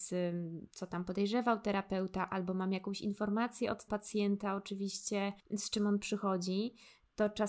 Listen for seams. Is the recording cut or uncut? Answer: cut